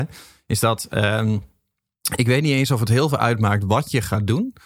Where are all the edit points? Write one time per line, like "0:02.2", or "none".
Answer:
none